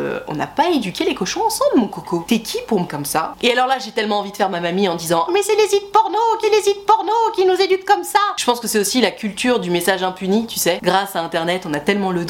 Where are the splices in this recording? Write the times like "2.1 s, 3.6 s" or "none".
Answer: 2.9 s, 5.3 s, 6.4 s

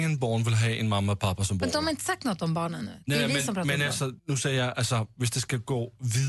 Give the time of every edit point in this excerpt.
4.2 s

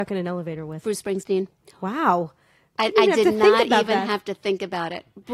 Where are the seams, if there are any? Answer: 2.9 s

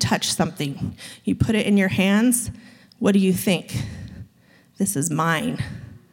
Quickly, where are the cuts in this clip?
none

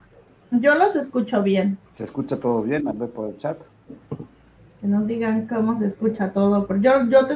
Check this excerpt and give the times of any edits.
1.8 s, 4.6 s

